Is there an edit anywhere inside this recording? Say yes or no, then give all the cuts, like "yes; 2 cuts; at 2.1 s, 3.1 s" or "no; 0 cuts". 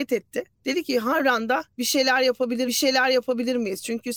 yes; 1 cut; at 2.6 s